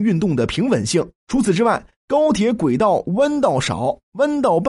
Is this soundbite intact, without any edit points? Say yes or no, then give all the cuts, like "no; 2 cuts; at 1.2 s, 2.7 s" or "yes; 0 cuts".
no; 1 cut; at 1.2 s